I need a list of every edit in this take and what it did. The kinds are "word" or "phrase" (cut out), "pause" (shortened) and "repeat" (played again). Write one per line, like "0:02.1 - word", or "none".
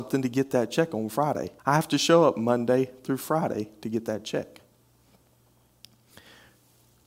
0:01.6 - pause